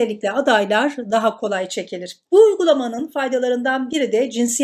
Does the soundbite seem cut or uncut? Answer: cut